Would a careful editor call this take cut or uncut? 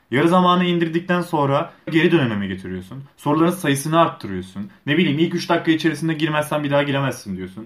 cut